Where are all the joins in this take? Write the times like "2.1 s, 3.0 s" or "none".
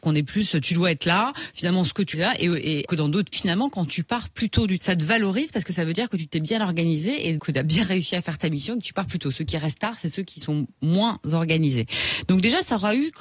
2.1 s, 2.9 s, 3.3 s, 4.8 s, 7.4 s